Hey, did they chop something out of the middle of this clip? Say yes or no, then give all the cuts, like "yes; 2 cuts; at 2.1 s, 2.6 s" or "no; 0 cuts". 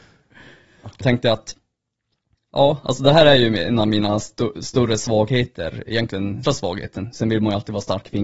yes; 2 cuts; at 1.0 s, 6.4 s